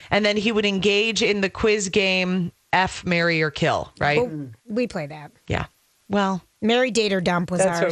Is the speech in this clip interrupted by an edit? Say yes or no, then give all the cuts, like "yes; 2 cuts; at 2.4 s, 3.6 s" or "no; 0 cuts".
yes; 1 cut; at 4.6 s